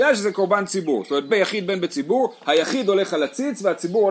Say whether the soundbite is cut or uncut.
cut